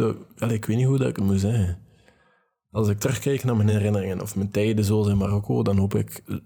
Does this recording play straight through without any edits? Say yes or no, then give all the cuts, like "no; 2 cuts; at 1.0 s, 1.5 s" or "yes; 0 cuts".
yes; 0 cuts